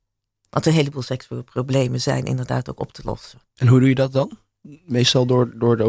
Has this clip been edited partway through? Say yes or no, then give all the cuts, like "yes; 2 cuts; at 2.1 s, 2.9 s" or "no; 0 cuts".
yes; 1 cut; at 3.5 s